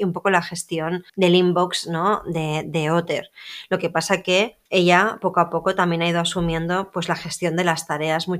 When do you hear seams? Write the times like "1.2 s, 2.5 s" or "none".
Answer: 1.1 s, 4.7 s